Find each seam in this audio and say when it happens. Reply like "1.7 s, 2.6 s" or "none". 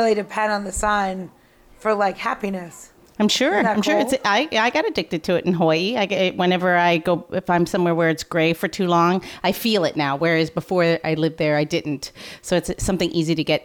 none